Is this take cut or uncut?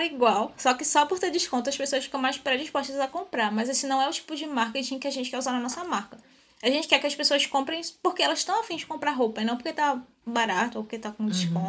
uncut